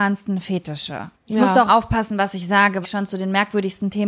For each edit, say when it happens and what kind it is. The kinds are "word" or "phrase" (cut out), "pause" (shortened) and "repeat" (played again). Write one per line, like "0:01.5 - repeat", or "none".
0:01.2 - pause
0:01.7 - word
0:02.8 - word